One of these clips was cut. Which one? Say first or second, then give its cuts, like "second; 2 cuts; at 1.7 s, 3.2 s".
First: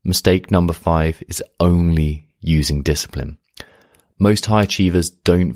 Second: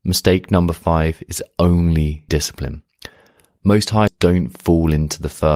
second; 2 cuts; at 2.3 s, 4.1 s